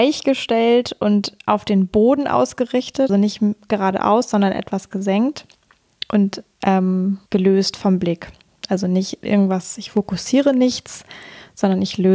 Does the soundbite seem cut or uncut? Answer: cut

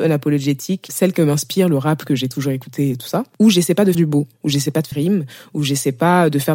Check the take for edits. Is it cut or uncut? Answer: cut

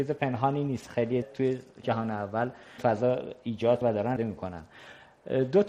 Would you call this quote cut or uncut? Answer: cut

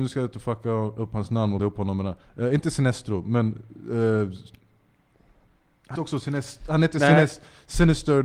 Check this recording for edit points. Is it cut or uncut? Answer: cut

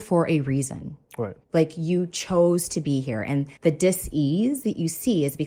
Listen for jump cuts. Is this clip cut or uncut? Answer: cut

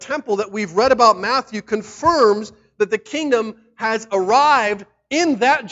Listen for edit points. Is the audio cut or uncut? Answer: uncut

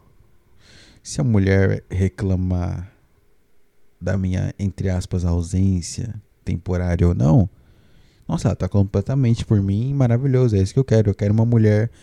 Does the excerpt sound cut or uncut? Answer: uncut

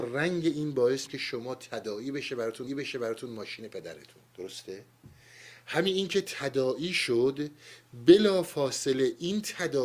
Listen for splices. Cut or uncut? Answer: cut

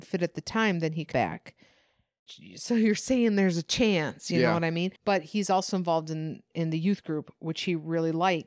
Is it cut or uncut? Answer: cut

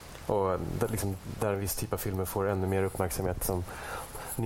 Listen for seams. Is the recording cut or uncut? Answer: uncut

